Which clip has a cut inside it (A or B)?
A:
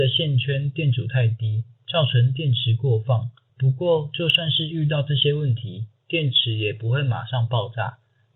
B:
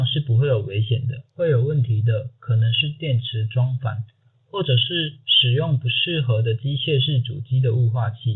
A